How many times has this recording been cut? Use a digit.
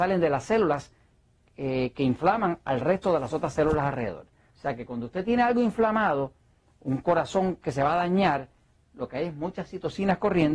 0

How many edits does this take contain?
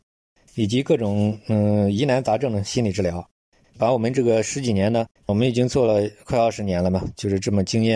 2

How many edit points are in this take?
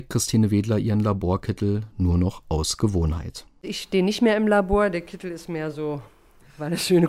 0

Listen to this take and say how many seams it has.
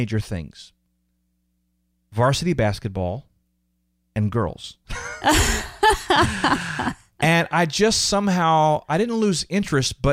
0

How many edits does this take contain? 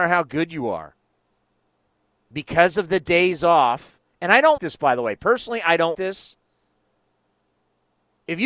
2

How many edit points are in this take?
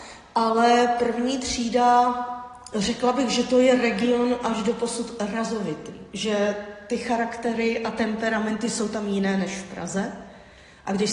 0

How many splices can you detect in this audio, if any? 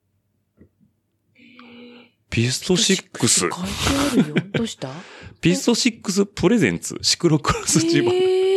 0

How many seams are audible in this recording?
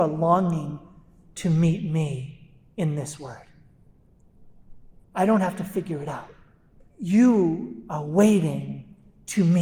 2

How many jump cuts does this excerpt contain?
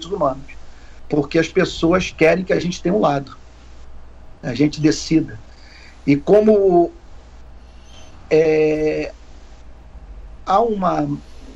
0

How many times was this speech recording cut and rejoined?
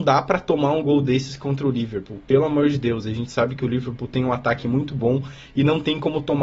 0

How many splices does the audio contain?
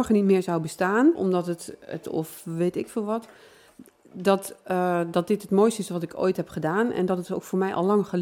2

